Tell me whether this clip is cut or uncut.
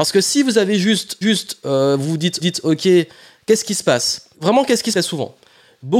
cut